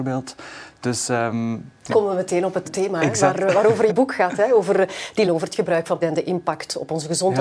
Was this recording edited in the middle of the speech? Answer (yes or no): yes